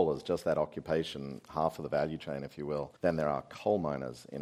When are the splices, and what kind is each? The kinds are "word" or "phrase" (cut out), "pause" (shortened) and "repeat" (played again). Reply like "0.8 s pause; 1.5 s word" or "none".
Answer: 3.0 s pause